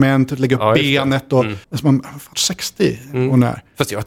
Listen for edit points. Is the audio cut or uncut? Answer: cut